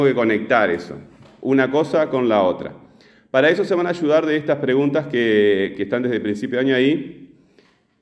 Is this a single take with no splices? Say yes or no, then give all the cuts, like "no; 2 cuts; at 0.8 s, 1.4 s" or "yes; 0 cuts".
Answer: yes; 0 cuts